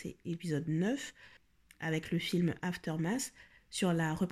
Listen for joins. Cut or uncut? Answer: uncut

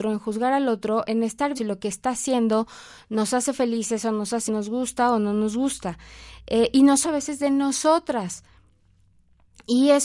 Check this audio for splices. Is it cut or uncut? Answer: cut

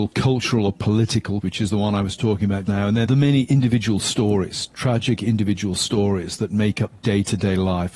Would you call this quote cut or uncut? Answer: cut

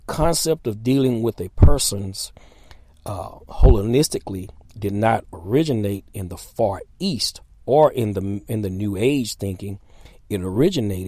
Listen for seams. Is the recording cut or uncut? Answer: uncut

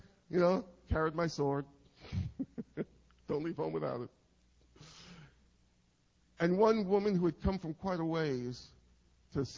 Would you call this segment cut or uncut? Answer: uncut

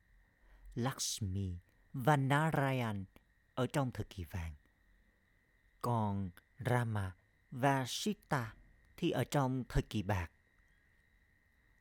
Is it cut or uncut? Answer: uncut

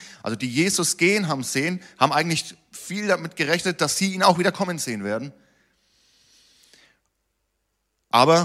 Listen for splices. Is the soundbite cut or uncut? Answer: uncut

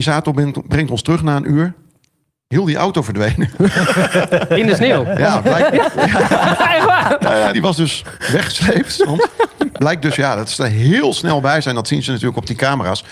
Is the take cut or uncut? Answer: cut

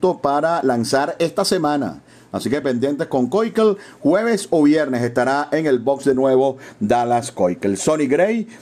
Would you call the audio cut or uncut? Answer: uncut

